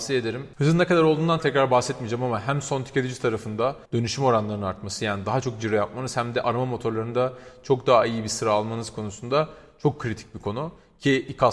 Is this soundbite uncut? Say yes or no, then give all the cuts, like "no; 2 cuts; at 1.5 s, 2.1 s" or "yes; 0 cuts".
no; 2 cuts; at 1.4 s, 3.8 s